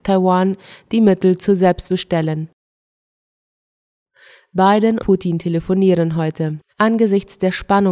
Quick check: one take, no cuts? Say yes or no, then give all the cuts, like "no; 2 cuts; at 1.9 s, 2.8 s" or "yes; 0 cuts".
no; 3 cuts; at 1.9 s, 5.0 s, 6.7 s